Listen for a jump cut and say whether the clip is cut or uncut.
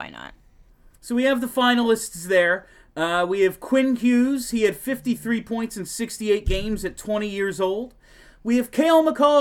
uncut